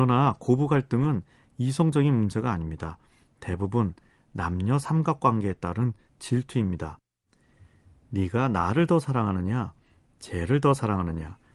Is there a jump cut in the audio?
no; 0 cuts

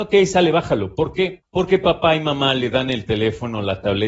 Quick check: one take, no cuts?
yes; 0 cuts

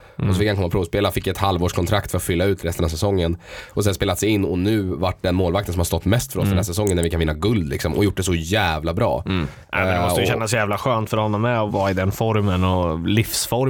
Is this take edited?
yes; 1 cut; at 11.7 s

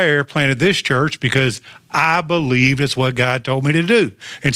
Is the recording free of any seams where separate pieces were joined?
yes; 0 cuts

